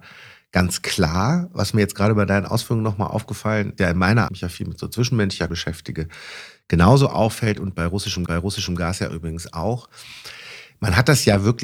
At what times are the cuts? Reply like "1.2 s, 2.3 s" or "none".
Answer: 3.8 s, 4.3 s, 5.5 s, 8.3 s